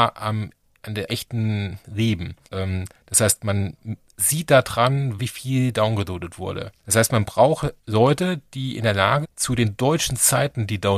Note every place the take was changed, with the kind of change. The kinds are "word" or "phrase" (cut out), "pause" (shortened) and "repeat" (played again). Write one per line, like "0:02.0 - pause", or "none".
0:01.1 - word
0:02.4 - pause
0:05.2 - word
0:06.8 - pause
0:07.8 - pause
0:09.2 - word